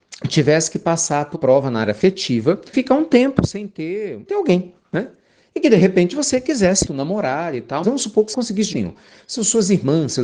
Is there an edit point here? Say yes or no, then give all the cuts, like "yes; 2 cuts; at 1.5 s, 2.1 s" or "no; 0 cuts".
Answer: yes; 7 cuts; at 1.3 s, 2.7 s, 4.3 s, 6.9 s, 7.8 s, 8.3 s, 8.7 s